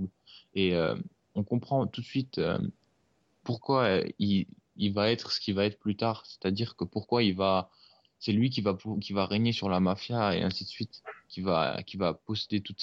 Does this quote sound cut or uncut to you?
uncut